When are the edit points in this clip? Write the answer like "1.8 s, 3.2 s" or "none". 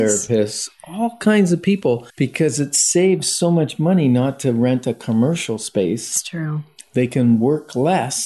2.1 s